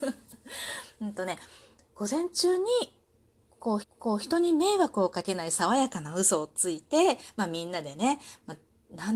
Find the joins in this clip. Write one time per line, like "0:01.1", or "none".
0:03.8